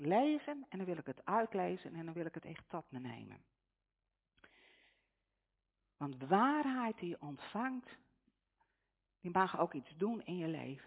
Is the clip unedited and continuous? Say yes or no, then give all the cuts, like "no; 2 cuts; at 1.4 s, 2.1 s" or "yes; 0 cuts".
yes; 0 cuts